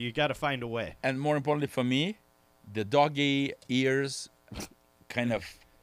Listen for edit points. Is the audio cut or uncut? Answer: cut